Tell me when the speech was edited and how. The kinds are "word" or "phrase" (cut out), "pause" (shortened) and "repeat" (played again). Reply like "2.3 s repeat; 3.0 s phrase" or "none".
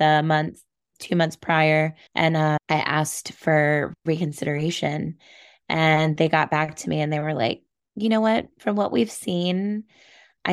2.1 s pause